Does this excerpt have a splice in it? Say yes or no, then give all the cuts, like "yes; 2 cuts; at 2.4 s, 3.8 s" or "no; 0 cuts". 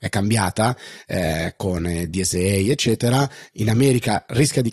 no; 0 cuts